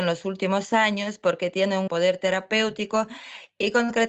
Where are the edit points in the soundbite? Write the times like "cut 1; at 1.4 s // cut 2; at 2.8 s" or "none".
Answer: cut 1; at 1.9 s